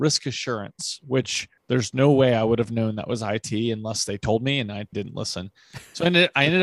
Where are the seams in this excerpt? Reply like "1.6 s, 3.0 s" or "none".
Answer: 1.6 s, 4.9 s